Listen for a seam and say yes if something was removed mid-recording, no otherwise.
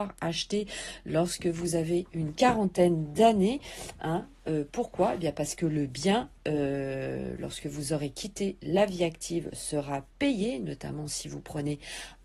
no